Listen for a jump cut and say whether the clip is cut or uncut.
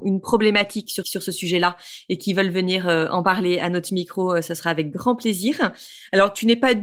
cut